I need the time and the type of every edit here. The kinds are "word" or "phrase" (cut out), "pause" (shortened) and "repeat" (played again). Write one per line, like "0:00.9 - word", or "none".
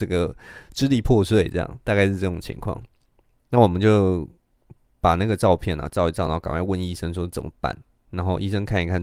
none